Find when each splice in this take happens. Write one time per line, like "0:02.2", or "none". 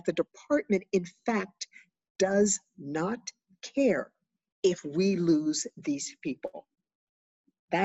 none

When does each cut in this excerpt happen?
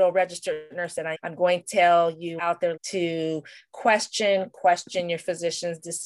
0:01.1
0:01.6
0:02.4
0:02.8
0:04.5

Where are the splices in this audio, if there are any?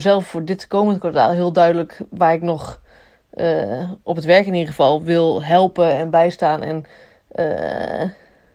none

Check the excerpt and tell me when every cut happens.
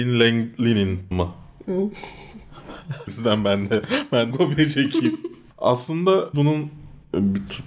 0:01.1
0:03.1
0:04.3
0:06.3

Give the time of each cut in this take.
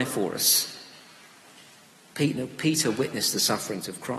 none

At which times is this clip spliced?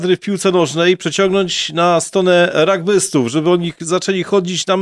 none

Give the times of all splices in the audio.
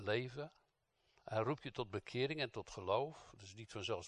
none

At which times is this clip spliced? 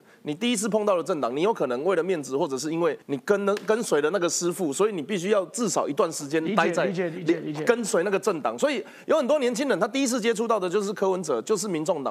0:03.0

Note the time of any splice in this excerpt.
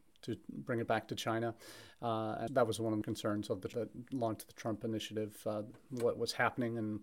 0:02.5
0:03.0
0:03.7

